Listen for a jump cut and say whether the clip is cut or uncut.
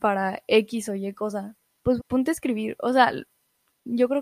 cut